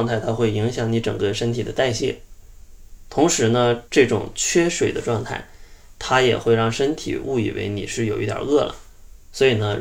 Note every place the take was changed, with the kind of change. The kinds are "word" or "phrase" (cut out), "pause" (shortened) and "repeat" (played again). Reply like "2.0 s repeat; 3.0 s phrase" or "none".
3.9 s pause